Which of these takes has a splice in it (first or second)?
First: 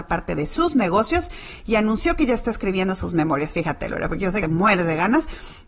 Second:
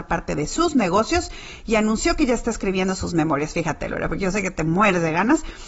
first